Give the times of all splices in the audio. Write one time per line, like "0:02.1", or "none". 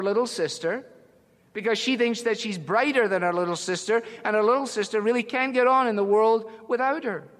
none